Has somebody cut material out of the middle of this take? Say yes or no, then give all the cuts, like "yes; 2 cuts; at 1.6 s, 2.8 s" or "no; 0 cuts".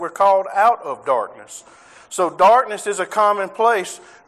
no; 0 cuts